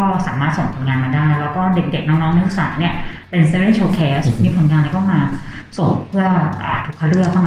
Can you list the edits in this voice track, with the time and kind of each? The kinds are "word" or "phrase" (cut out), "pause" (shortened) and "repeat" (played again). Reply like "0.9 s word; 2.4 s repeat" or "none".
none

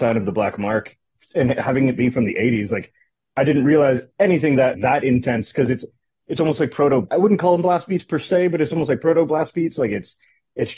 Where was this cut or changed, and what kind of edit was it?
4.7 s word; 7.1 s word

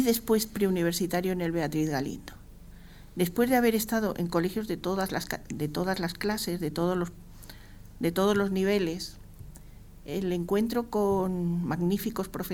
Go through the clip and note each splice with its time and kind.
none

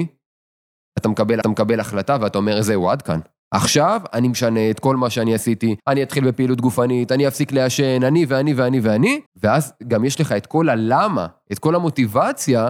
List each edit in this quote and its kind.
1.4 s repeat; 3.4 s pause; 5.8 s pause; 9.3 s pause

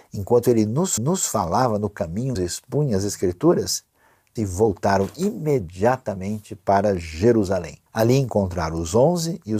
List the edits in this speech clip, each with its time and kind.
1.0 s repeat; 2.4 s word; 4.4 s word; 7.9 s pause

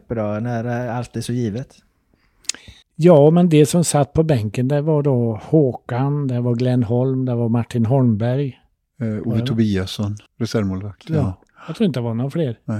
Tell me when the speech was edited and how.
2.8 s pause; 8.8 s pause; 10.3 s pause

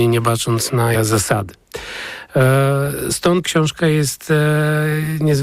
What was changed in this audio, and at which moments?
0.9 s word; 3.4 s word

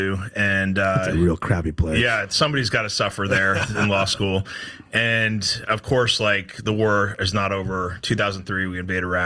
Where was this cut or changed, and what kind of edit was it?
none

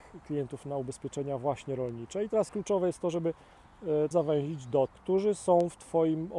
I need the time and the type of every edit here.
2.5 s word; 4.1 s phrase; 4.9 s word

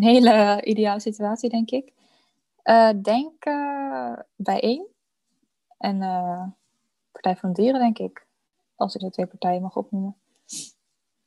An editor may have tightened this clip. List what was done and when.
4.3 s pause; 9.0 s word

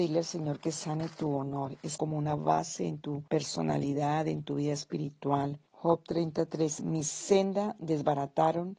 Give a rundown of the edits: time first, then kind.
2.0 s phrase; 3.3 s pause; 5.7 s pause; 6.8 s word

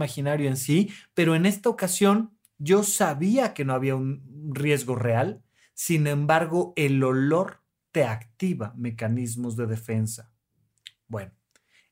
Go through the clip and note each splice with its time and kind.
none

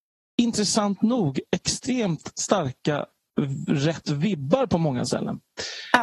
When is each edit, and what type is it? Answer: none

